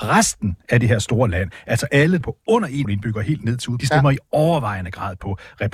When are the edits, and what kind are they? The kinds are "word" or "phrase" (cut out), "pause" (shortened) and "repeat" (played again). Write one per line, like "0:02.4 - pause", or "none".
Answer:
0:02.2 - phrase
0:02.8 - word
0:03.8 - phrase